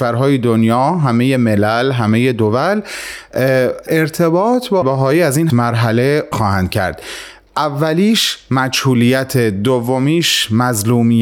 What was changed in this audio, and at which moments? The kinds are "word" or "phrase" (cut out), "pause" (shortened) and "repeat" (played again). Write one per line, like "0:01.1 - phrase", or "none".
0:03.9 - word
0:04.8 - word
0:05.5 - word
0:06.3 - word